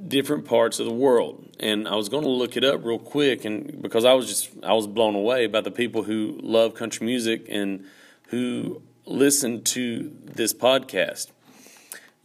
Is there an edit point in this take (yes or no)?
no